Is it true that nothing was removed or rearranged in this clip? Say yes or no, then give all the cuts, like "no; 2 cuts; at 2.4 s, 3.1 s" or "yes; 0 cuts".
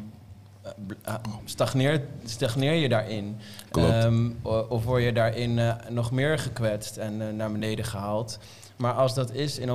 yes; 0 cuts